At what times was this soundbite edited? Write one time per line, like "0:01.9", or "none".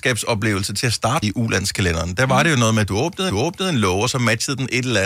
0:01.2
0:03.3